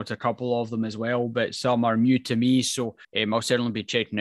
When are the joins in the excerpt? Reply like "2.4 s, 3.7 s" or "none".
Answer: 3.0 s

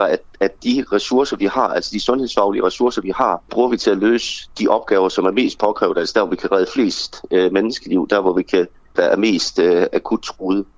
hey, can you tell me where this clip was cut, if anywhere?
3.5 s, 9.0 s

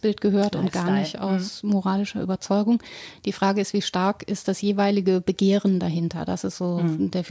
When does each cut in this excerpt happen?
none

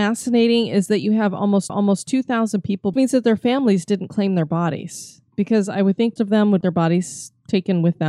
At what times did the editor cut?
1.7 s, 2.9 s, 6.2 s, 6.6 s

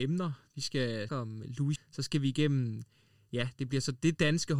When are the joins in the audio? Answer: 1.1 s, 1.8 s

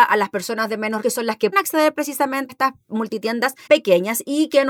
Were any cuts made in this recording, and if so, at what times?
1.0 s, 1.5 s, 2.5 s, 3.7 s

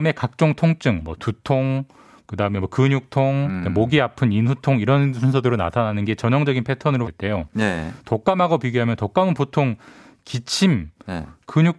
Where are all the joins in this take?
7.0 s

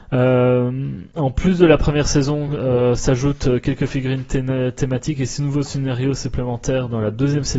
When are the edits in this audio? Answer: none

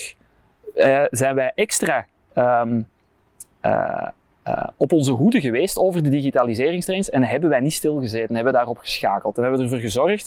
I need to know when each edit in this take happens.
none

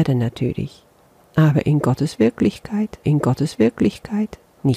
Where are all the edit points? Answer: 3.0 s

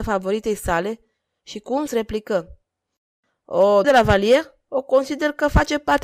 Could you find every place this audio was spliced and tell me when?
1.9 s, 3.8 s

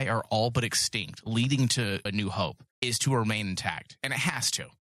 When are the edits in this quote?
2.1 s, 2.7 s

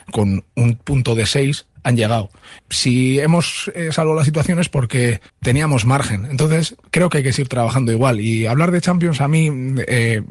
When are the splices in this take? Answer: 1.7 s, 2.6 s, 5.3 s

